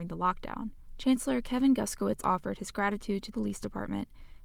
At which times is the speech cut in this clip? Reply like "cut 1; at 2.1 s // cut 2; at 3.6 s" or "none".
cut 1; at 2.2 s // cut 2; at 3.3 s

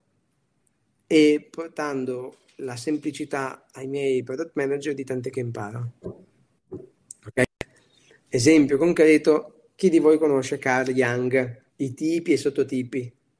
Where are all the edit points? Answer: cut 1; at 5.3 s // cut 2; at 11.7 s

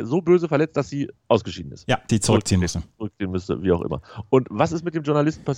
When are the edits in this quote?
cut 1; at 1.2 s // cut 2; at 2.1 s

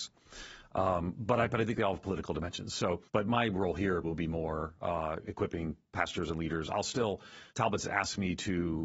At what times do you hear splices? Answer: cut 1; at 3.1 s // cut 2; at 4.0 s // cut 3; at 7.5 s

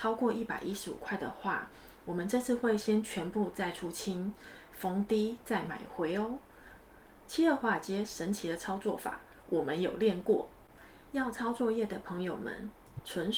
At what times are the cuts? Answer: none

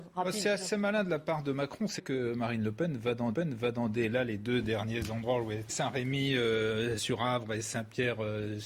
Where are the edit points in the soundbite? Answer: cut 1; at 2.0 s // cut 2; at 3.3 s // cut 3; at 5.7 s // cut 4; at 7.0 s

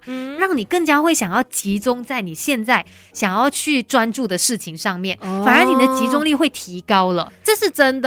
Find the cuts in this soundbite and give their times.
none

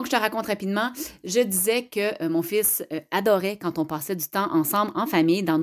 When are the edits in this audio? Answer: none

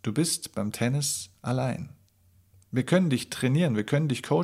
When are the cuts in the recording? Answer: none

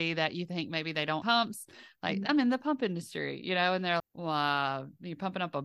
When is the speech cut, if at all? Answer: cut 1; at 1.2 s // cut 2; at 4.0 s

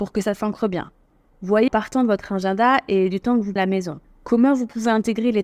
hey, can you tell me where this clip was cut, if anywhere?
cut 1; at 1.7 s // cut 2; at 3.6 s // cut 3; at 4.0 s

